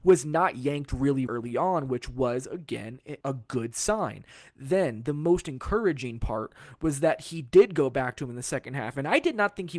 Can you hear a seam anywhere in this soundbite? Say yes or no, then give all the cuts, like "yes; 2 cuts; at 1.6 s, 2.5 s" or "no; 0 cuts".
yes; 2 cuts; at 1.3 s, 3.2 s